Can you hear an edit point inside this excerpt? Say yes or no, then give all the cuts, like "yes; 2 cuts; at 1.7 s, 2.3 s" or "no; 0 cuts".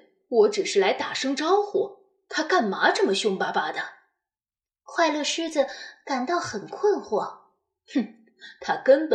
no; 0 cuts